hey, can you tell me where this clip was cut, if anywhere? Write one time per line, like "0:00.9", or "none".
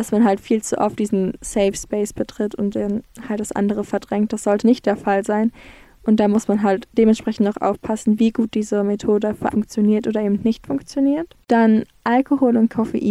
0:04.6
0:06.9
0:09.5

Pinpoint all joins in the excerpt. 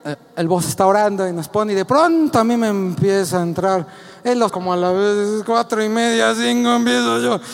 0:04.5

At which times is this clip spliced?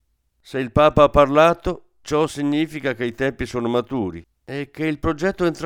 none

